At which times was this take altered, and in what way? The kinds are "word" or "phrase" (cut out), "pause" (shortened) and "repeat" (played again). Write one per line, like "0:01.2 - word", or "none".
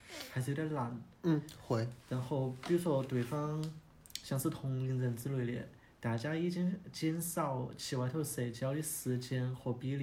0:02.0 - pause